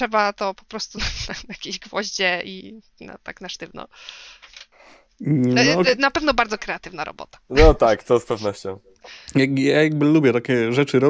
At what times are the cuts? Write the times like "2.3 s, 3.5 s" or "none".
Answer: none